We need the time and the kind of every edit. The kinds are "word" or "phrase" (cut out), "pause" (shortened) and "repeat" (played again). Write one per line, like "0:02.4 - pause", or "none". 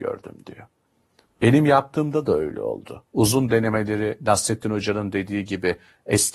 0:03.1 - pause